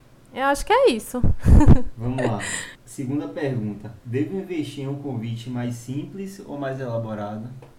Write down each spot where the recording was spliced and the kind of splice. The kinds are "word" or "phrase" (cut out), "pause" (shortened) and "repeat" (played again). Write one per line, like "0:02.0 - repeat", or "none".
0:02.8 - pause
0:04.0 - pause